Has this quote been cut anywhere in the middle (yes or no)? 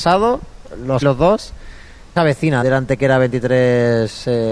yes